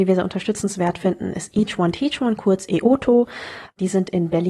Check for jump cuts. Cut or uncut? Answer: uncut